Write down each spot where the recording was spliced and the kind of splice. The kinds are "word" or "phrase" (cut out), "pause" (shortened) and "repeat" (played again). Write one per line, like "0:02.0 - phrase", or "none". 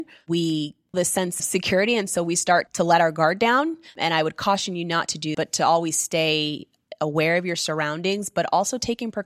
0:00.9 - word
0:01.4 - word
0:02.7 - word
0:05.3 - word